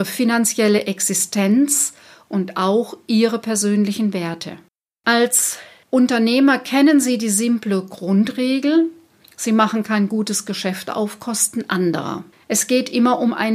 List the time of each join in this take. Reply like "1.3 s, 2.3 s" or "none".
4.7 s